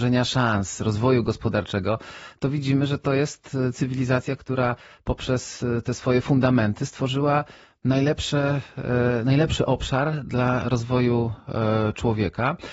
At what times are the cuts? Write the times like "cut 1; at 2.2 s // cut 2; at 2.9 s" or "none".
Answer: none